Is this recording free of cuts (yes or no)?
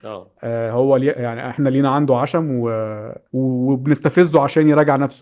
no